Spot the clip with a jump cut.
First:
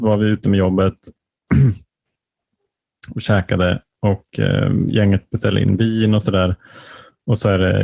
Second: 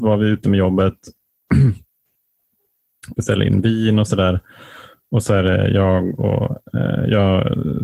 second; 1 cut; at 3.1 s

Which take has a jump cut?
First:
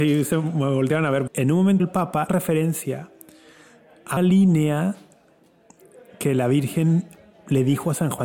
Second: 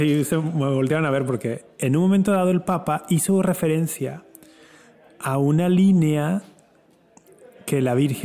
first; 4 cuts; at 1.3 s, 1.8 s, 2.3 s, 4.2 s

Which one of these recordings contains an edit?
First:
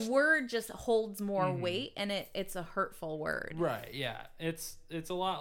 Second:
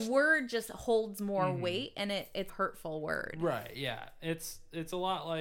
second; 1 cut; at 2.5 s

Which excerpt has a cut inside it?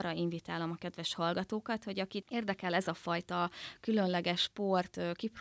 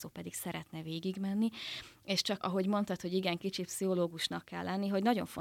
second; 1 cut; at 2.4 s

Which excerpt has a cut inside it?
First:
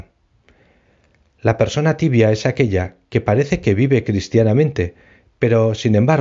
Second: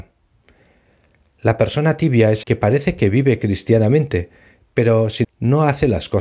second; 2 cuts; at 2.4 s, 5.2 s

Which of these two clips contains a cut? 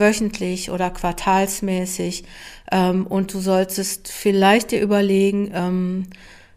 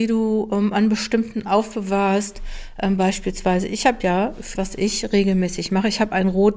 second; 2 cuts; at 1.4 s, 4.6 s

